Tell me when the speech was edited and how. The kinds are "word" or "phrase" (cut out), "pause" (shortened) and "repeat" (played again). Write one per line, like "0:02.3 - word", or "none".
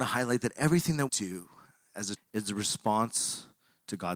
0:01.1 - word
0:02.2 - word